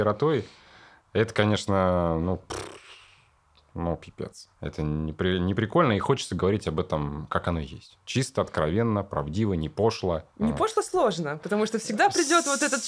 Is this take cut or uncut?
uncut